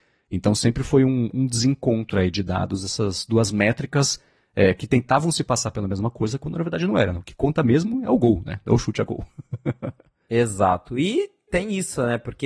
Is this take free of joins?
yes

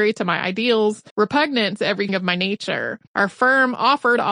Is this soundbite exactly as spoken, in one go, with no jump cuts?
no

